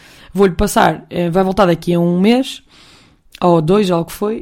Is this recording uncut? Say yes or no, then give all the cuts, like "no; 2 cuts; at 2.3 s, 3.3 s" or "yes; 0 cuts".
yes; 0 cuts